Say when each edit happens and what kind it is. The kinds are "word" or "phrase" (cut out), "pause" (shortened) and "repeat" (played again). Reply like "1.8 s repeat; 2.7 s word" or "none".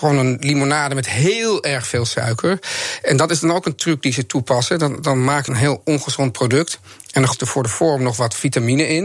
5.5 s phrase; 7.3 s word

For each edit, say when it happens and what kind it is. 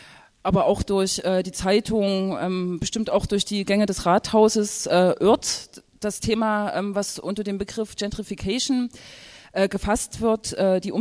none

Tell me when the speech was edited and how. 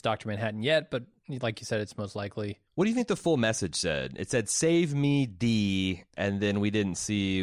2.7 s pause

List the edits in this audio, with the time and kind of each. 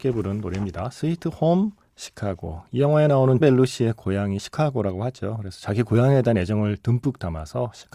1.8 s pause; 3.4 s word

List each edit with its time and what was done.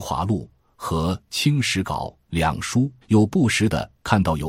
3.0 s pause

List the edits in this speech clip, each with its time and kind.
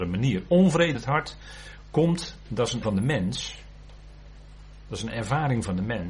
0.9 s word; 2.8 s word

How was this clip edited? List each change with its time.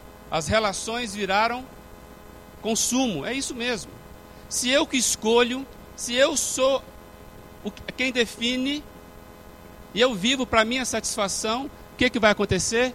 none

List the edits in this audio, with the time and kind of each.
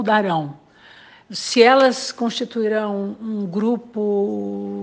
none

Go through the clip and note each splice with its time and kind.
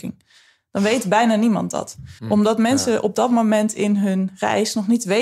2.2 s pause

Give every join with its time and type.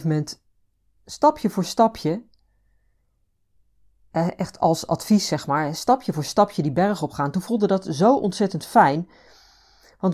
none

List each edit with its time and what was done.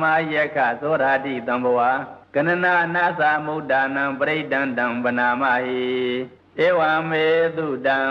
2.2 s pause; 6.4 s pause

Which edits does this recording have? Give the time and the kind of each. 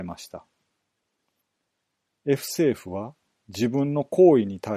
none

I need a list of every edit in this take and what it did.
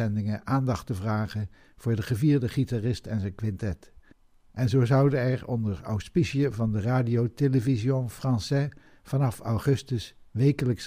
none

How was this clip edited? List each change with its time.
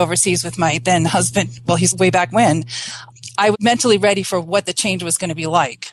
1.9 s phrase; 3.5 s word

